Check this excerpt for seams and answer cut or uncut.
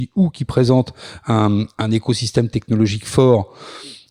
uncut